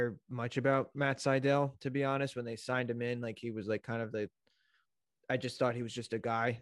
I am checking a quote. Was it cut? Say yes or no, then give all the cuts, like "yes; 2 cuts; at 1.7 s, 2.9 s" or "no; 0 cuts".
no; 0 cuts